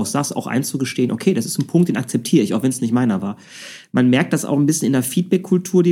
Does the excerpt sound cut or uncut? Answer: uncut